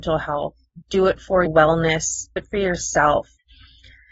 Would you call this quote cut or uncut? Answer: cut